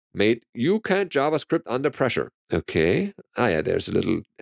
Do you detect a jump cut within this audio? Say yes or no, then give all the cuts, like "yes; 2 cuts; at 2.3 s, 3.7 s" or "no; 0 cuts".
yes; 1 cut; at 2.4 s